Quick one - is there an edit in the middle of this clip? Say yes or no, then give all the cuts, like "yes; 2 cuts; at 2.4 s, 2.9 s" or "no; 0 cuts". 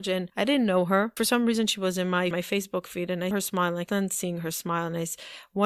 yes; 4 cuts; at 1.2 s, 2.3 s, 3.3 s, 3.9 s